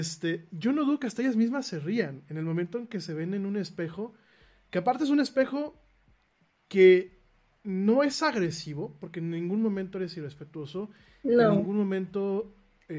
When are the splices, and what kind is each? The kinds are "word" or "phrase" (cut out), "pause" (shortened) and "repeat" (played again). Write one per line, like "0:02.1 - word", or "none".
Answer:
none